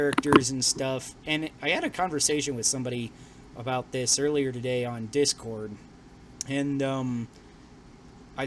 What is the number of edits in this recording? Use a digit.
1